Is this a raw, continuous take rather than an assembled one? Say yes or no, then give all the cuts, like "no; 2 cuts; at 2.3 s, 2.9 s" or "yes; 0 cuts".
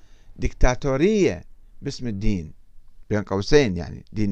yes; 0 cuts